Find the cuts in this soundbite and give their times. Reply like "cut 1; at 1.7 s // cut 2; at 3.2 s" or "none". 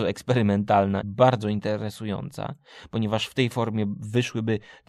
cut 1; at 1.0 s